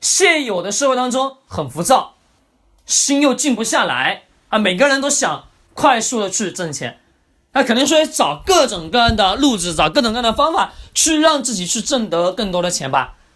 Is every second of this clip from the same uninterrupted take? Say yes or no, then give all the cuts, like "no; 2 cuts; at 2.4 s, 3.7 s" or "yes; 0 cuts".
yes; 0 cuts